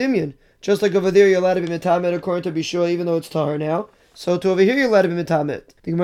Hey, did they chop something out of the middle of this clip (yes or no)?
no